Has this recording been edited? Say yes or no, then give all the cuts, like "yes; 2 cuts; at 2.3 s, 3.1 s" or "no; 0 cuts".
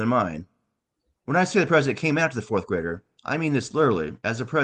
yes; 1 cut; at 0.9 s